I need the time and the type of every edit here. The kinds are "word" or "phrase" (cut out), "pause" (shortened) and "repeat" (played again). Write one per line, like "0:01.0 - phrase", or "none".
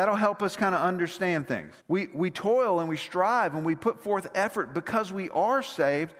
0:01.8 - pause